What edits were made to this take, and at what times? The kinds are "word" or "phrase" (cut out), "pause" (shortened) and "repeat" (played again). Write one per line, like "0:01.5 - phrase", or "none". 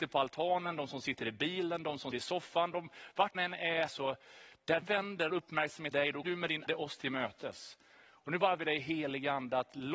0:02.1 - word
0:03.3 - word
0:03.9 - word
0:04.8 - word
0:05.3 - word
0:05.9 - word
0:06.2 - word
0:06.7 - word
0:08.6 - word